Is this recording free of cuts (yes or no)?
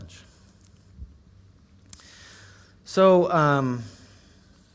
yes